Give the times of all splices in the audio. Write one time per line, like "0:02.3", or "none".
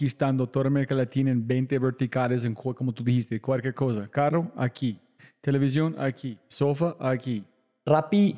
none